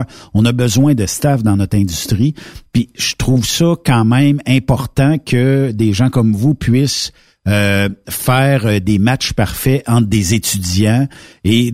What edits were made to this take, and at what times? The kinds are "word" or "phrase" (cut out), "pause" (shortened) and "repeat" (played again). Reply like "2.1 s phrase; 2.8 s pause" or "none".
none